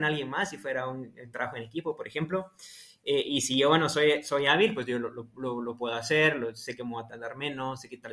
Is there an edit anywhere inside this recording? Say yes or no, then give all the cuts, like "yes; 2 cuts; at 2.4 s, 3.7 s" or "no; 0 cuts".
no; 0 cuts